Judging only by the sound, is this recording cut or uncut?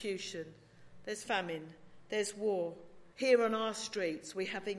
cut